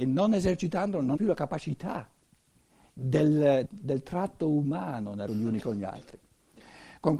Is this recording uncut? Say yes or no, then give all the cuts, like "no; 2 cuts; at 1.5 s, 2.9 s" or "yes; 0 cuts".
no; 3 cuts; at 1.2 s, 3.6 s, 5.3 s